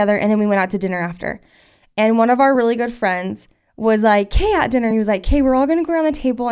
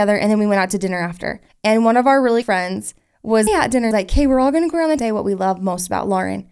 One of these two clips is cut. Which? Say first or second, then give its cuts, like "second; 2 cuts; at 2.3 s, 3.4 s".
second; 5 cuts; at 1.5 s, 2.4 s, 3.5 s, 3.9 s, 5.0 s